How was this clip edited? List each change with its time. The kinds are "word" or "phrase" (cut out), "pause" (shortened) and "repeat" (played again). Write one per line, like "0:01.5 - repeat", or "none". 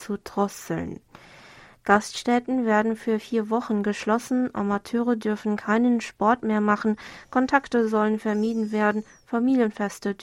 none

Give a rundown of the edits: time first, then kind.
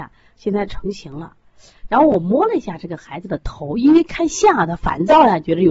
none

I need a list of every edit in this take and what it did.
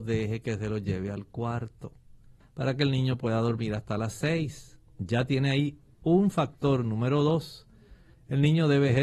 0:04.9 - pause

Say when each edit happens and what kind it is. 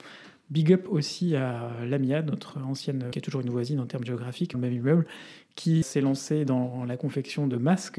0:03.1 - word
0:04.5 - phrase
0:05.8 - word

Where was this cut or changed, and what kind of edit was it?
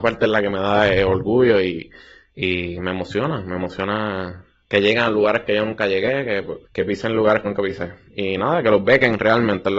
0:06.6 - pause
0:07.5 - word

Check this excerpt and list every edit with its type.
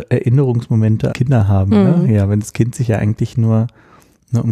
0:01.1 - phrase
0:02.7 - phrase

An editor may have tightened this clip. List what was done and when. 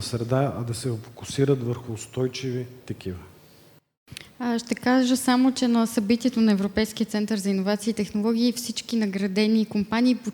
none

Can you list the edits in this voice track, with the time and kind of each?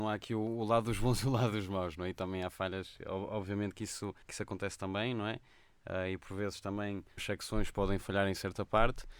0:04.2 - pause
0:07.2 - phrase

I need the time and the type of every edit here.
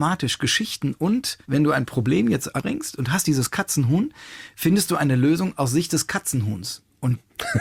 0:01.4 - pause
0:02.6 - phrase

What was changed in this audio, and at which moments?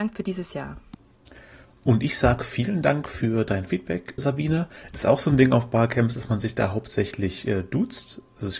0:04.2 - word

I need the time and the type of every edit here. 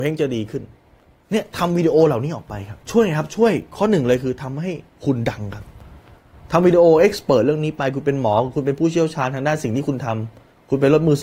0:02.8 - pause

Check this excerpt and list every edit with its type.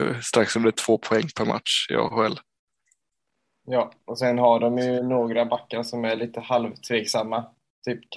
none

